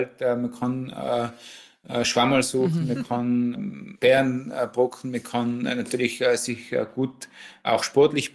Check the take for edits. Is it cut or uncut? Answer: uncut